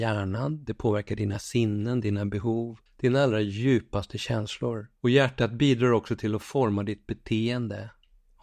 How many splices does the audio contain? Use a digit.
2